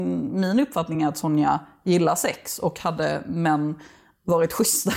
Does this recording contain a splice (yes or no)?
no